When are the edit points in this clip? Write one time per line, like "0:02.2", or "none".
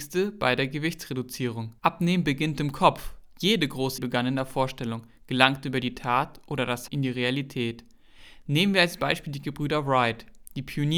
0:01.8
0:04.0
0:06.9